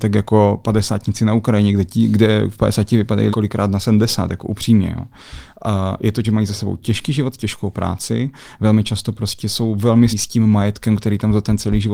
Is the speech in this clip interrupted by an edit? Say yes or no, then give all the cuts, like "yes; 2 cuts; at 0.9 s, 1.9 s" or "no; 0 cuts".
yes; 3 cuts; at 3.3 s, 6.2 s, 10.1 s